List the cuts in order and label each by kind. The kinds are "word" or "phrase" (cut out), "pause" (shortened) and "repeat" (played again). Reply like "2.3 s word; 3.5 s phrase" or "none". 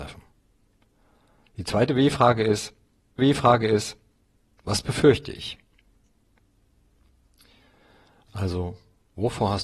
3.2 s repeat